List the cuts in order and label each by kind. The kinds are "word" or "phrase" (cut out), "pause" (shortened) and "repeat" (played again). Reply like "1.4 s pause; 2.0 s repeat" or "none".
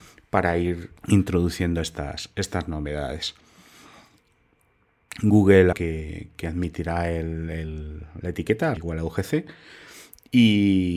1.0 s pause; 5.7 s phrase; 8.8 s word